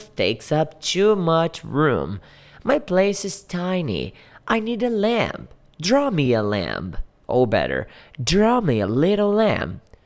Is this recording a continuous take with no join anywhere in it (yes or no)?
yes